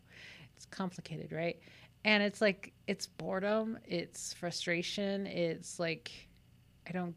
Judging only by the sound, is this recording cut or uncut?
uncut